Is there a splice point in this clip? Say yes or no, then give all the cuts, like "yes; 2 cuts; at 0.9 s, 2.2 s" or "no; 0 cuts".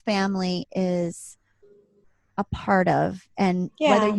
no; 0 cuts